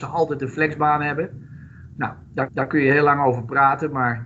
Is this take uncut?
no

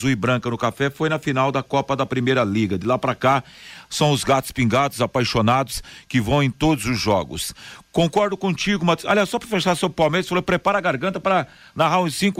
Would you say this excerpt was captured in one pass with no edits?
yes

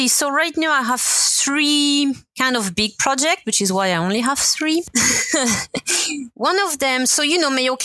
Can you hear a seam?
no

